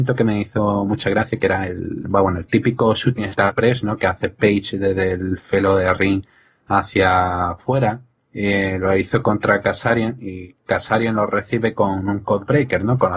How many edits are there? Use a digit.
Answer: 0